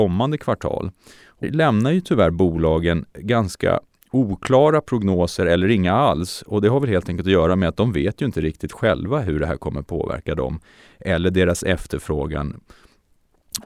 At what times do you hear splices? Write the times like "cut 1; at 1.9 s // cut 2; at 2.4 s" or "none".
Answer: cut 1; at 1.4 s